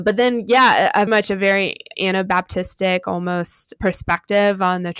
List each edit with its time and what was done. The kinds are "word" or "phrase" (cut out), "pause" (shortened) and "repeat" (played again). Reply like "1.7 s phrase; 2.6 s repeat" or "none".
1.1 s word; 1.9 s word; 3.8 s word